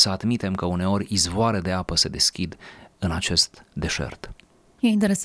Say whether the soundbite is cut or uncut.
uncut